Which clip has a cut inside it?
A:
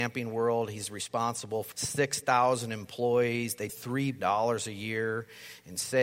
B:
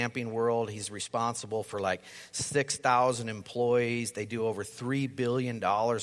A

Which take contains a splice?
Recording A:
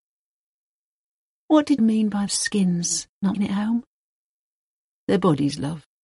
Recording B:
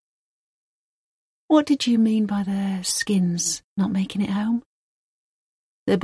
A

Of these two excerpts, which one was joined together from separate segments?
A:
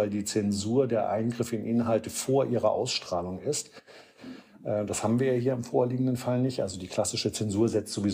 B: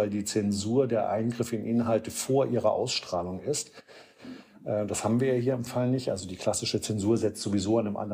B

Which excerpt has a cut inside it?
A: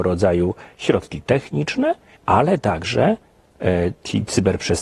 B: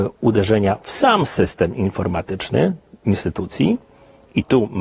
A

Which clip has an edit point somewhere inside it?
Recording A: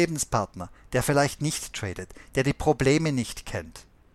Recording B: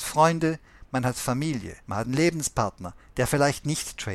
B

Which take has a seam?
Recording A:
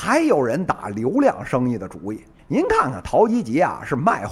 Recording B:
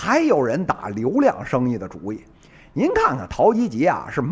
A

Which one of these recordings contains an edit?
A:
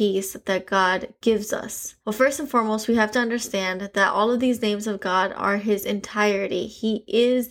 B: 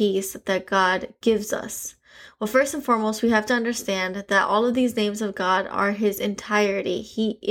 A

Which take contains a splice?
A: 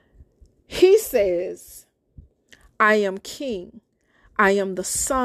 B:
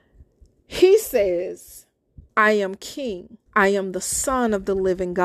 B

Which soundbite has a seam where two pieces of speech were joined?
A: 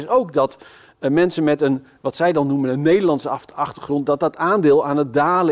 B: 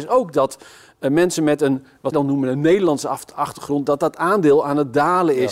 B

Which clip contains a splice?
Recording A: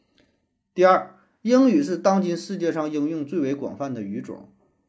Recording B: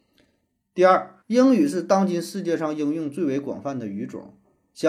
B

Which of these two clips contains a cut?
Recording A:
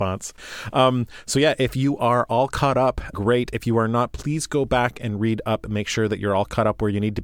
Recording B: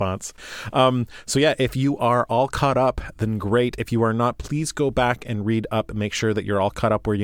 A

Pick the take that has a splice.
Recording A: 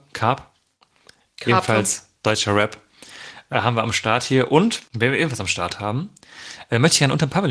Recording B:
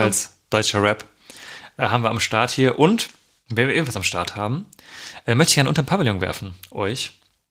A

